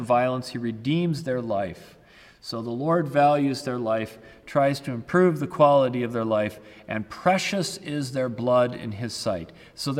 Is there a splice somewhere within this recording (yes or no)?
no